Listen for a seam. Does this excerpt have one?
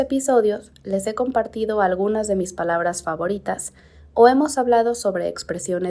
no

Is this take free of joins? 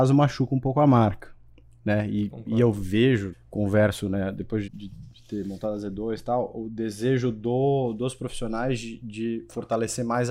no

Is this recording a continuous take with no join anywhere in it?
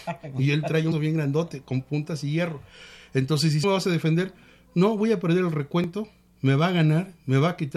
no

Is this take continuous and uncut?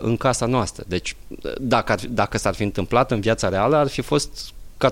yes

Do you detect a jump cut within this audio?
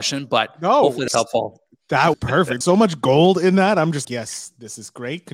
yes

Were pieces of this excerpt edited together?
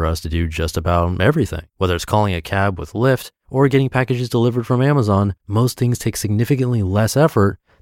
yes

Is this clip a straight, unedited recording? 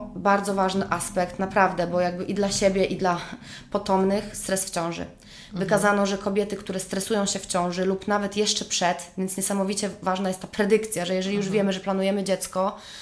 yes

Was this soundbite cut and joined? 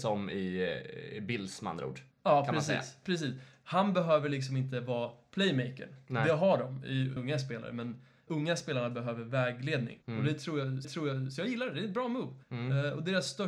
yes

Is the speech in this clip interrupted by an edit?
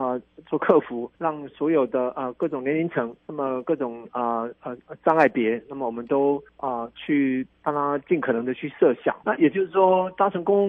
yes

